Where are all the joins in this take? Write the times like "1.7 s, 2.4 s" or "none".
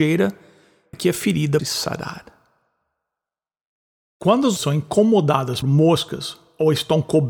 0.9 s, 1.6 s, 4.6 s, 5.6 s